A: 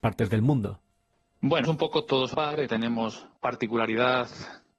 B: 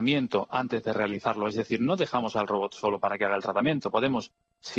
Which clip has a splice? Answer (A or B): A